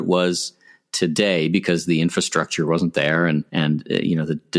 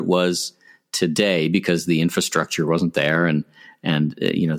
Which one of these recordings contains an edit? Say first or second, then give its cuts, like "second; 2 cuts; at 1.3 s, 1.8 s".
first; 1 cut; at 3.5 s